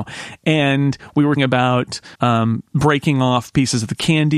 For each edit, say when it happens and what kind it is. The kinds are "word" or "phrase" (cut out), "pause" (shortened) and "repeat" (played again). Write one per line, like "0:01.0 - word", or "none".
0:01.4 - word
0:02.1 - pause